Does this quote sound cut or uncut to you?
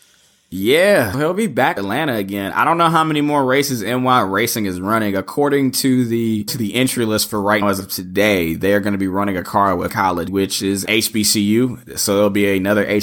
cut